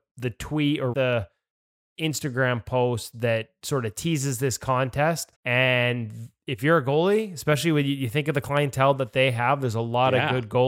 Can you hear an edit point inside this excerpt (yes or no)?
yes